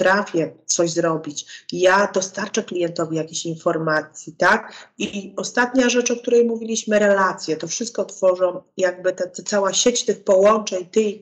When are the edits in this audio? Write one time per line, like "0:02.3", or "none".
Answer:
none